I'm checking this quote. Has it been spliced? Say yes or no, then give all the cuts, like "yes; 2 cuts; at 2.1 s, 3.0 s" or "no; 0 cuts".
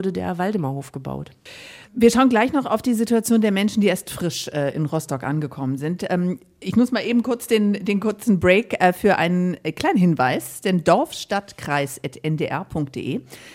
yes; 1 cut; at 1.9 s